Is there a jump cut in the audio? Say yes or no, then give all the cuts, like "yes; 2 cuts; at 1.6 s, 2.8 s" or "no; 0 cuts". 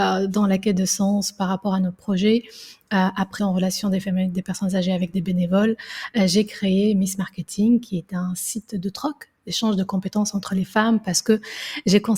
yes; 1 cut; at 3.4 s